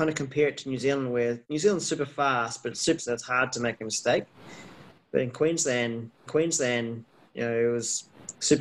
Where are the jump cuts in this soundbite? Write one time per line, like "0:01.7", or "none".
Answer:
0:01.4
0:03.0
0:06.3